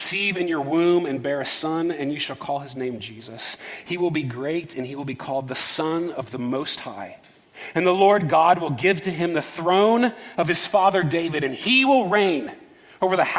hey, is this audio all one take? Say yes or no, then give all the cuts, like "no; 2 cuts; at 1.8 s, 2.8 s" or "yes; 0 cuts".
yes; 0 cuts